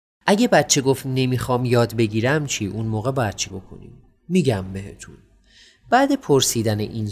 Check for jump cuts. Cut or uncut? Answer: cut